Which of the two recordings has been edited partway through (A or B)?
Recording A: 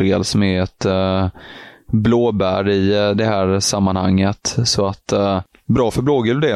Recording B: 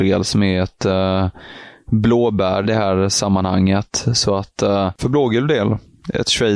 B